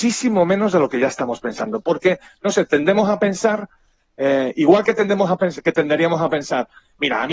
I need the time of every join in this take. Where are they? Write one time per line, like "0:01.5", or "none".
none